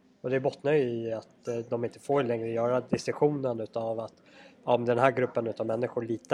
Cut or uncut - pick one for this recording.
uncut